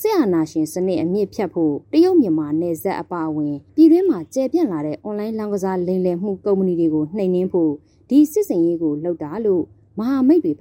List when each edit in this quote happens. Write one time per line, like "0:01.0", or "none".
0:01.8
0:03.7